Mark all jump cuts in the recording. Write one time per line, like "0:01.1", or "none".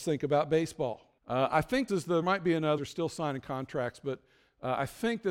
0:01.2
0:01.9
0:02.2
0:02.8